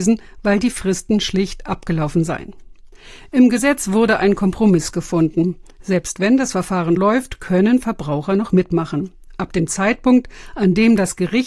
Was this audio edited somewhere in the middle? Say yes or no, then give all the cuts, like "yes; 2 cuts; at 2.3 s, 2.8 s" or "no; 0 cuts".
yes; 1 cut; at 7.0 s